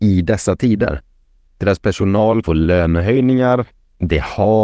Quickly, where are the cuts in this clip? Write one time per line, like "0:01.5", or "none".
0:02.4